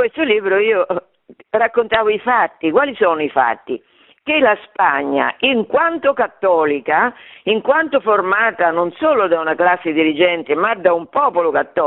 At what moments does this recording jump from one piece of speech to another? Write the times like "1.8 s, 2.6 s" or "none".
none